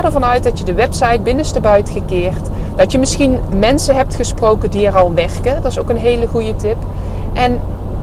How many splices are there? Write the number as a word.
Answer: two